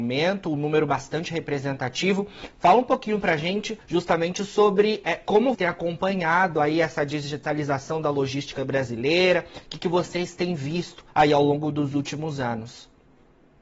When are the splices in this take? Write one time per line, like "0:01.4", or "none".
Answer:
0:03.8
0:05.5
0:11.1